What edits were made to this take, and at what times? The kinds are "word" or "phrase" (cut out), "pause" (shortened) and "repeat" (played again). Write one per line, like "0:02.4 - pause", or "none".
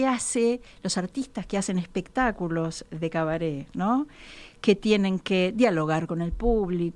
none